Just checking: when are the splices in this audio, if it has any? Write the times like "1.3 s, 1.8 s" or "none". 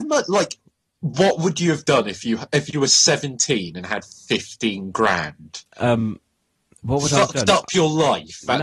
none